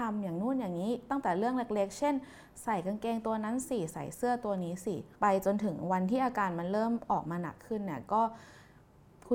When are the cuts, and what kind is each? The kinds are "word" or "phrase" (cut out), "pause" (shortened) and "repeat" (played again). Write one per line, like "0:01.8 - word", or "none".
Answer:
0:05.1 - pause